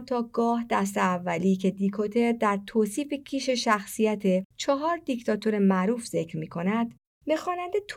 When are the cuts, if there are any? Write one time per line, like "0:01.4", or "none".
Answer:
none